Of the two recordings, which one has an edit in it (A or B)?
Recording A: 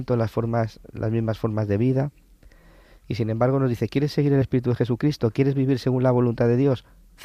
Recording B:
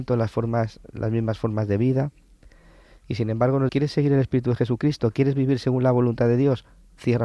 B